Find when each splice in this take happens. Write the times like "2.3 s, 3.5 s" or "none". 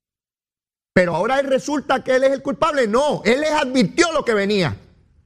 none